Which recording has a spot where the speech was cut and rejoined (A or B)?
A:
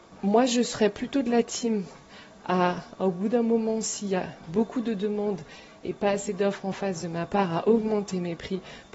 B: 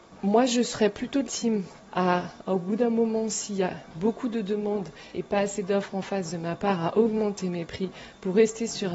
B